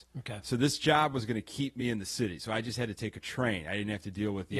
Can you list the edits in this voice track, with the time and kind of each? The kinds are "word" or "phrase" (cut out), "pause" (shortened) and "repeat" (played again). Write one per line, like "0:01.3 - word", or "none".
none

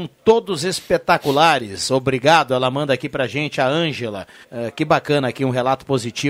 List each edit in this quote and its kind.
0:04.4 - pause

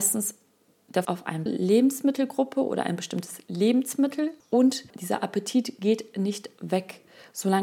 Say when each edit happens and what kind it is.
0:01.0 - word
0:01.5 - word
0:04.9 - pause

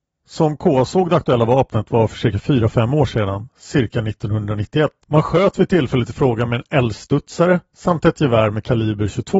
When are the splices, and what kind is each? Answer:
0:05.0 - pause

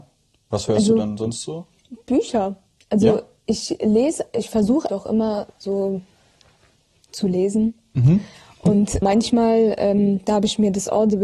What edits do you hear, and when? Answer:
0:04.9 - word
0:09.0 - word

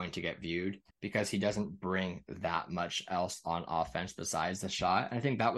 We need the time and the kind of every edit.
0:00.9 - pause

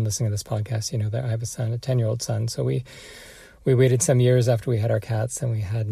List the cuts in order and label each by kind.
none

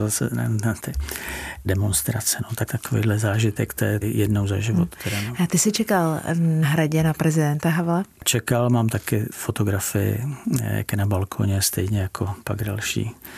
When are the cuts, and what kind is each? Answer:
0:01.6 - word
0:02.7 - word
0:04.0 - phrase
0:06.6 - word
0:08.9 - word

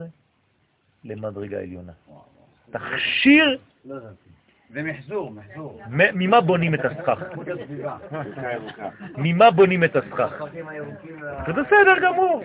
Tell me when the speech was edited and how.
none

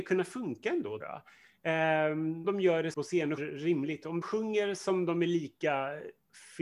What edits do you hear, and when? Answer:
0:01.0 - word
0:02.4 - word
0:02.9 - word
0:03.4 - word
0:04.2 - word

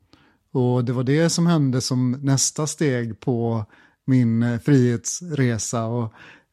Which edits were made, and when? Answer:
none

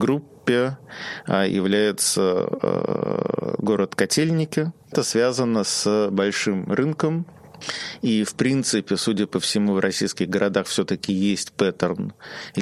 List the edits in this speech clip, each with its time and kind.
0:04.8 - pause

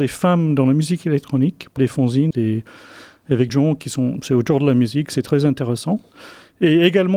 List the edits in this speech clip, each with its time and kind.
0:01.8 - word
0:02.3 - word
0:03.5 - word

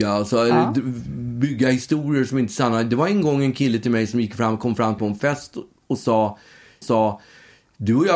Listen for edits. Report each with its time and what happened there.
0:05.0 - phrase
0:06.8 - repeat

